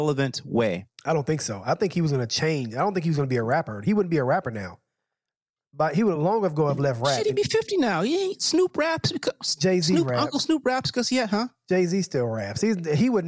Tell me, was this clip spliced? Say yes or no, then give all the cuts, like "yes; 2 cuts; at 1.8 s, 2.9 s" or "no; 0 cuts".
no; 0 cuts